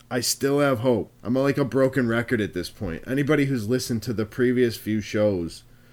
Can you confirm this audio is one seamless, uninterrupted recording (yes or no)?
no